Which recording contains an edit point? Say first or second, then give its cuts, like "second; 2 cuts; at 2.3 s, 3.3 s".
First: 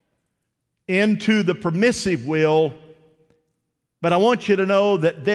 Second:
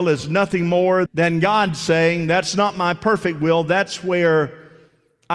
second; 1 cut; at 1.1 s